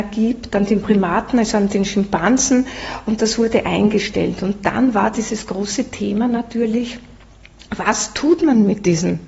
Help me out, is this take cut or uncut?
uncut